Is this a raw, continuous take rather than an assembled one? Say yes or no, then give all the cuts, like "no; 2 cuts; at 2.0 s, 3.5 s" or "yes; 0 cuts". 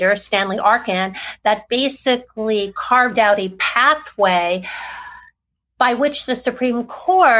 yes; 0 cuts